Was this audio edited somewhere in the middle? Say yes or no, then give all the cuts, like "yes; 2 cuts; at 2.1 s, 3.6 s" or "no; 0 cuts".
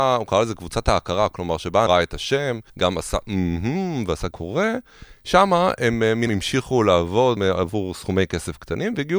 yes; 5 cuts; at 1.9 s, 2.7 s, 4.3 s, 6.3 s, 7.4 s